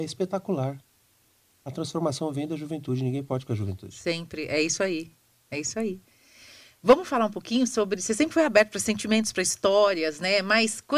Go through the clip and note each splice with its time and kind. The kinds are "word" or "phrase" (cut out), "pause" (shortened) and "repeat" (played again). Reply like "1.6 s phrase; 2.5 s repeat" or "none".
none